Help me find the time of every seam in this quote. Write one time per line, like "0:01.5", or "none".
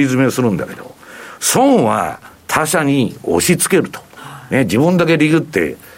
0:02.3